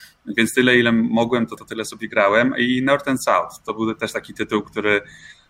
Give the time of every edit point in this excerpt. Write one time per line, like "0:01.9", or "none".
0:01.6